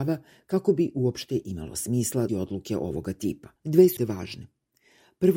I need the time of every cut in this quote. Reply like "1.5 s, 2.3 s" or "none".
2.3 s, 3.6 s, 4.0 s